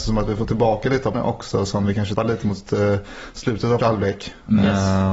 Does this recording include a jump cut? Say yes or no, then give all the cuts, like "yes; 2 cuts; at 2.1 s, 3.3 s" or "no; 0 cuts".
yes; 3 cuts; at 1.1 s, 2.2 s, 3.8 s